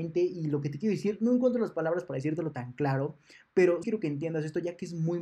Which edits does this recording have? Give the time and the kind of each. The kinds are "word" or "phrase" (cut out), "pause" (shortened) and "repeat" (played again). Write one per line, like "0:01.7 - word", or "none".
0:03.8 - word